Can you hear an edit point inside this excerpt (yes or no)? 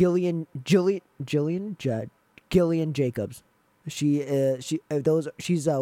no